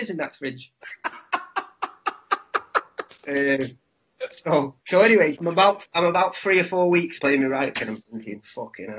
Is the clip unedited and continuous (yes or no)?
no